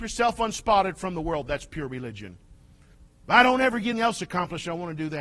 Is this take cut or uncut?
cut